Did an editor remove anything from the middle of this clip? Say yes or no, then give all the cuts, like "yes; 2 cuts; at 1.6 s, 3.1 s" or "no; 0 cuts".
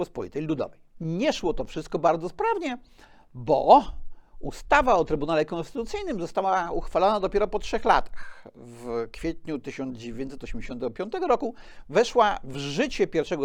no; 0 cuts